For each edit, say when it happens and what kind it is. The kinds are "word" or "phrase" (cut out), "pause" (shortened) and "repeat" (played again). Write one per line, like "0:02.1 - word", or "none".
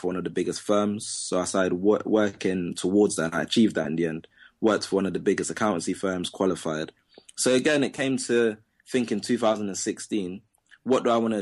none